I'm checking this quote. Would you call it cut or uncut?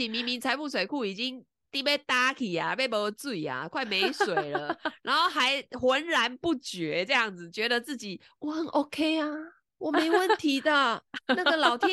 uncut